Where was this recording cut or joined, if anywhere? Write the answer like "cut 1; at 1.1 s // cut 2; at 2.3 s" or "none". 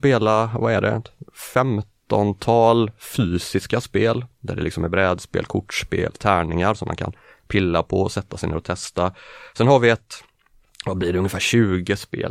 none